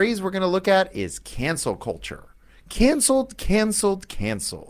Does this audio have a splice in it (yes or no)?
no